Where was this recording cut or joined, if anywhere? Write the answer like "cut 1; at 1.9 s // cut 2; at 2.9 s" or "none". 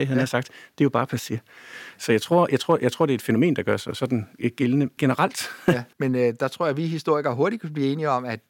cut 1; at 5.0 s // cut 2; at 5.9 s

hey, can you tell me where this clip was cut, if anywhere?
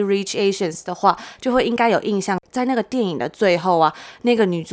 cut 1; at 2.5 s

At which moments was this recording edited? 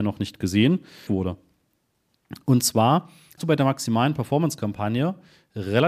cut 1; at 1.1 s // cut 2; at 3.4 s

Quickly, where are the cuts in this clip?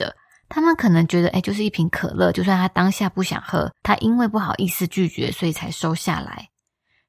cut 1; at 3.8 s

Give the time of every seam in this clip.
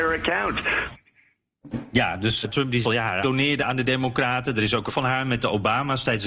cut 1; at 2.4 s // cut 2; at 2.8 s // cut 3; at 3.2 s // cut 4; at 4.9 s

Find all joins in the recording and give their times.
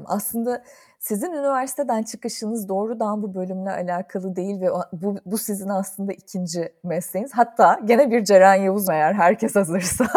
cut 1; at 8.9 s

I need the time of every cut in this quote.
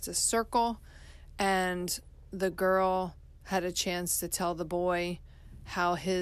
none

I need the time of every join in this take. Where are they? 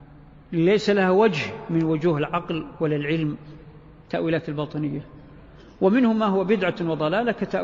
none

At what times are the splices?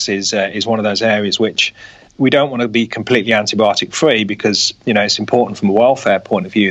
none

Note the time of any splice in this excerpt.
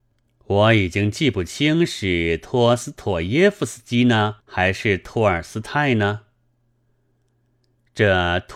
cut 1; at 4.4 s

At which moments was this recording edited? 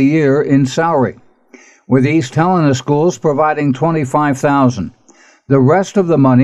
none

